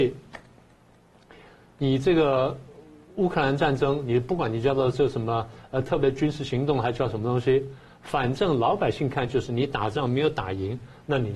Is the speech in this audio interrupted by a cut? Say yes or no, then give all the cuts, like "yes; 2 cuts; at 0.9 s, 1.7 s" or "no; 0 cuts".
no; 0 cuts